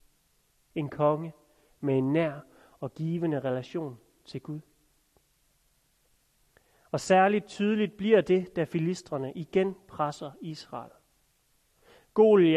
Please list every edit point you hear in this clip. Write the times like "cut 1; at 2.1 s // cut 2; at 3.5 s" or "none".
none